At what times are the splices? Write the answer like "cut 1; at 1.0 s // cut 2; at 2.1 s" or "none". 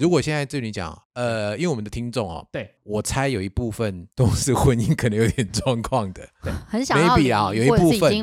cut 1; at 1.0 s // cut 2; at 2.8 s // cut 3; at 4.1 s